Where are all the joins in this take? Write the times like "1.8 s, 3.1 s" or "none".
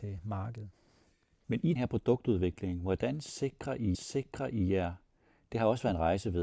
1.8 s, 3.9 s